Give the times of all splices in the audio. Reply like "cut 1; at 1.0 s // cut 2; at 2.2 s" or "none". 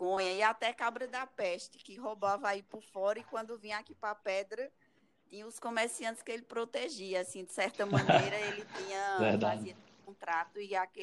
none